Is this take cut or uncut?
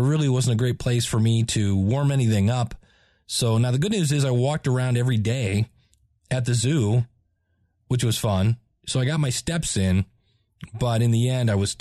uncut